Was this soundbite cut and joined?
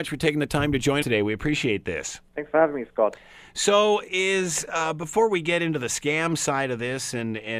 yes; 2 cuts; at 1.0 s, 2.3 s

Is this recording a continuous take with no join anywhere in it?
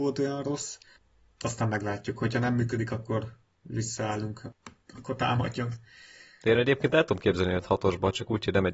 yes; 0 cuts

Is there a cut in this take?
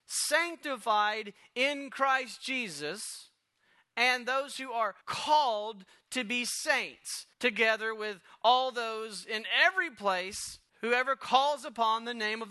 yes; 3 cuts; at 5.0 s, 7.3 s, 10.7 s

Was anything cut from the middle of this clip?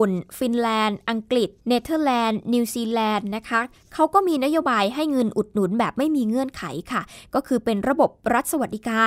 yes; 1 cut; at 1.6 s

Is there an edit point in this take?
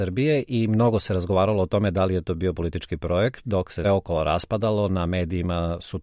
yes; 1 cut; at 3.8 s

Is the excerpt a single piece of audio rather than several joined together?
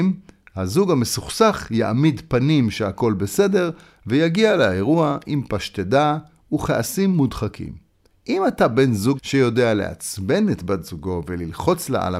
no; 1 cut; at 9.2 s

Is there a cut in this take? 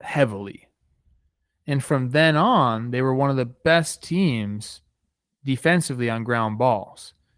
no; 0 cuts

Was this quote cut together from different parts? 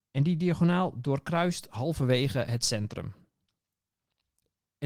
no; 0 cuts

